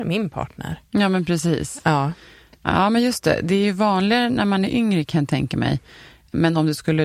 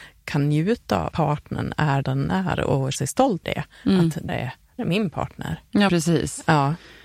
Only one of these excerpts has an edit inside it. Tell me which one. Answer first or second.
second